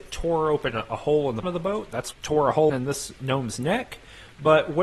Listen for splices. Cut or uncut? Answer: cut